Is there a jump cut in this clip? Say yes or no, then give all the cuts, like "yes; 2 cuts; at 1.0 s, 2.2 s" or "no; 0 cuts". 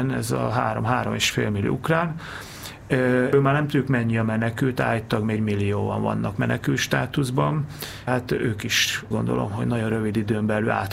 yes; 4 cuts; at 3.3 s, 5.4 s, 8.1 s, 9.1 s